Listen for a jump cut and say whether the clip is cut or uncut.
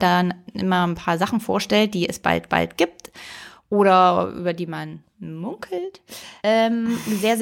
cut